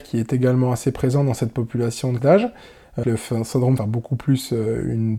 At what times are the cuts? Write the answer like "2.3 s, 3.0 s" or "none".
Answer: 2.2 s, 3.0 s, 3.8 s